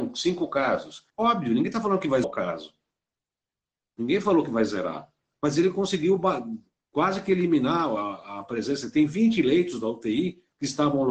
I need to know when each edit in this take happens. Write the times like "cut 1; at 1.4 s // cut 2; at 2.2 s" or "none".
cut 1; at 1.1 s // cut 2; at 2.2 s

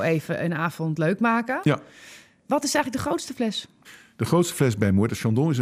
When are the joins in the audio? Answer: none

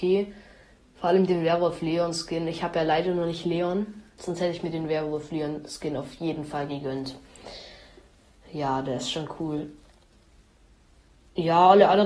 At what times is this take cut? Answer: none

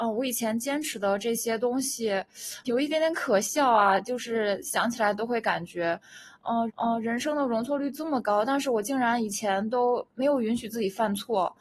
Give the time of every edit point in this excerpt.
cut 1; at 2.6 s // cut 2; at 6.7 s

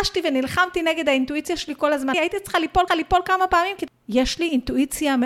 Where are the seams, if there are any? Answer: cut 1; at 2.1 s // cut 2; at 2.9 s // cut 3; at 3.9 s

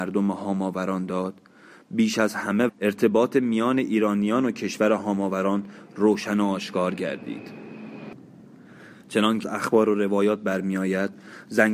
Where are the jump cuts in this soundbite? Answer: cut 1; at 2.7 s // cut 2; at 9.4 s

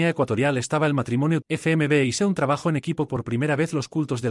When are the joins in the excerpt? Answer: cut 1; at 1.4 s // cut 2; at 2.2 s // cut 3; at 3.1 s

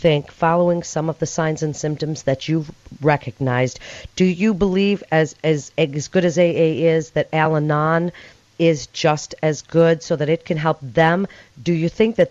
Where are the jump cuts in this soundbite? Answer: none

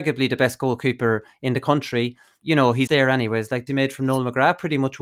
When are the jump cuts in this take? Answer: cut 1; at 2.4 s // cut 2; at 2.9 s // cut 3; at 3.7 s

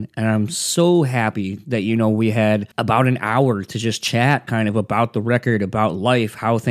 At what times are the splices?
cut 1; at 2.7 s

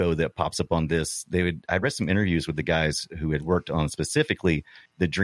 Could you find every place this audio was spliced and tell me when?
none

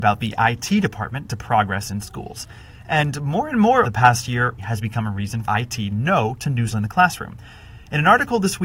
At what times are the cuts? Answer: cut 1; at 1.3 s // cut 2; at 3.8 s // cut 3; at 4.6 s // cut 4; at 5.4 s // cut 5; at 5.9 s // cut 6; at 6.7 s

